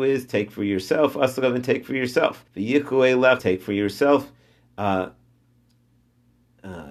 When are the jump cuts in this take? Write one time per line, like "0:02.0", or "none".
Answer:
0:02.5
0:03.4